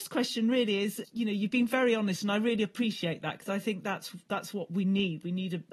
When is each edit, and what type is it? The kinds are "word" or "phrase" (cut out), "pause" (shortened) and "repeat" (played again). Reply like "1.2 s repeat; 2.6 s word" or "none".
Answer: none